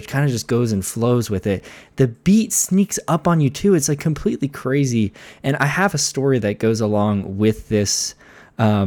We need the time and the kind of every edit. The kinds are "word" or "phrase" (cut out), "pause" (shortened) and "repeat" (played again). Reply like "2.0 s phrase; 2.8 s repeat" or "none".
none

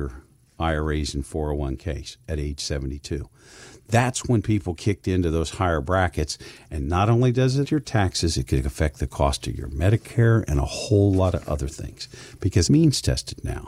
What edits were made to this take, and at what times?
4.8 s word; 7.6 s word; 12.7 s word

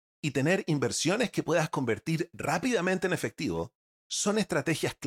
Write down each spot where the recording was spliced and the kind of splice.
none

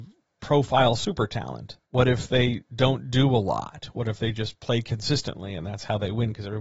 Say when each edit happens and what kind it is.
1.8 s pause

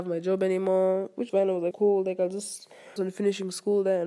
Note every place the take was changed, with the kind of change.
1.3 s word; 1.7 s word; 3.0 s word

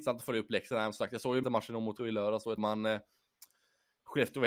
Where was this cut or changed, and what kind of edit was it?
1.4 s word; 2.0 s word; 2.6 s word

